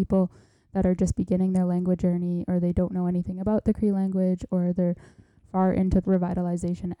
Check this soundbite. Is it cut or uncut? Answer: cut